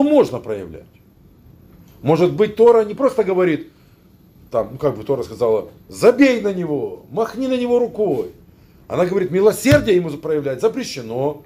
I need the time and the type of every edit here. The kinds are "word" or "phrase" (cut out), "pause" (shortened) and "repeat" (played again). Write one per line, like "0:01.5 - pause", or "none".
none